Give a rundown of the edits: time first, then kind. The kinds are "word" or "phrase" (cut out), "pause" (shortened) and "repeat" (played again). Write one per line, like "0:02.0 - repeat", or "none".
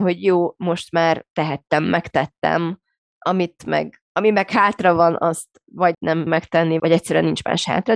0:01.3 - word
0:03.0 - pause
0:04.0 - pause
0:05.9 - word
0:06.3 - word
0:06.8 - word